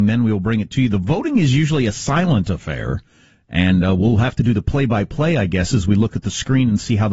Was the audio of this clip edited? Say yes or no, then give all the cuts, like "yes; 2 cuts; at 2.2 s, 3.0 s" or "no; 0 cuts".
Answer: no; 0 cuts